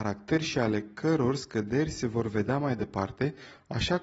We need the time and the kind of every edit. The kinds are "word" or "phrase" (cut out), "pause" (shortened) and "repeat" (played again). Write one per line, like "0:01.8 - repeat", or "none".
none